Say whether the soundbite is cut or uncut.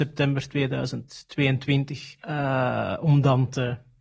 cut